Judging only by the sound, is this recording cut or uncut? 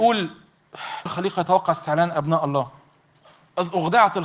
cut